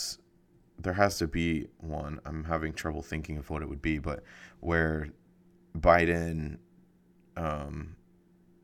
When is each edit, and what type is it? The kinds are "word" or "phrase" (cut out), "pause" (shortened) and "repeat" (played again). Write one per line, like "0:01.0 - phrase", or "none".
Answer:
none